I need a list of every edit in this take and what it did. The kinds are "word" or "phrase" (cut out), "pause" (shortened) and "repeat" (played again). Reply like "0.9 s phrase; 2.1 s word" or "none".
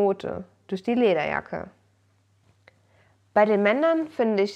none